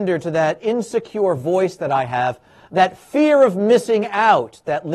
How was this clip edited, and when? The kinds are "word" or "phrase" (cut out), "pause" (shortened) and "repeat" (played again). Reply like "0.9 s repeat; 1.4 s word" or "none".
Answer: none